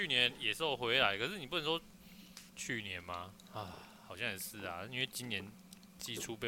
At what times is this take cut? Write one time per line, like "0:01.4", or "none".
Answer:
0:02.5